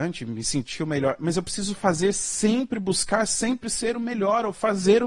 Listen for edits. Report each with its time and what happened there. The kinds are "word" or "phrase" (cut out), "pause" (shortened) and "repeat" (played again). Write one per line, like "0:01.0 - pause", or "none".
none